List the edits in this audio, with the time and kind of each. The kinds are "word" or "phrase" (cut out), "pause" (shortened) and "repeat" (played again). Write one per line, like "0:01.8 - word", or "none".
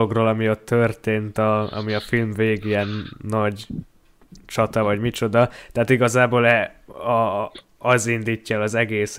none

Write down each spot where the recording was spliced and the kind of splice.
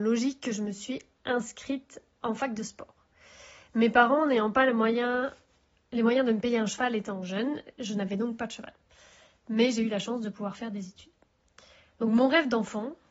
none

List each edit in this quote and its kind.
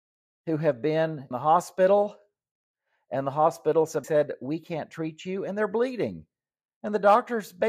0:01.3 - word
0:04.0 - word

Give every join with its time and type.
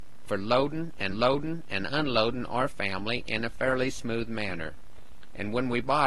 0:01.1 - repeat

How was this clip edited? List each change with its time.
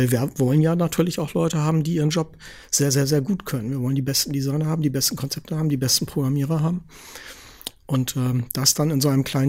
none

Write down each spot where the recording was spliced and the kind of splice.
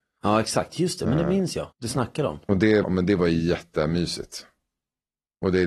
0:01.7 - pause
0:02.8 - word

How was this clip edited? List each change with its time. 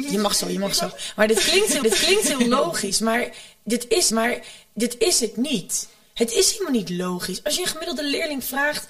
0:01.8 - repeat
0:04.1 - repeat

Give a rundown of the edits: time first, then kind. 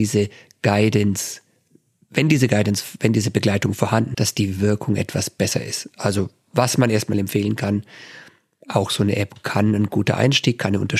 0:04.1 - word

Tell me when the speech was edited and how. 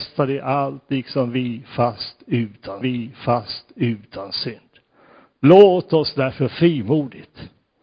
0:02.8 - repeat

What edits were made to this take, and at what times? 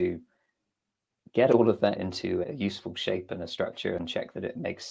0:01.9 - word
0:02.4 - word

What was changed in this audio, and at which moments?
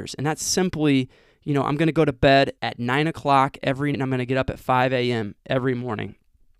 0:02.6 - pause
0:03.9 - word

